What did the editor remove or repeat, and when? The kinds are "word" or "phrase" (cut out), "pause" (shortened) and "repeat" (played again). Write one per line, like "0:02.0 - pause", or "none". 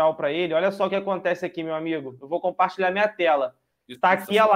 none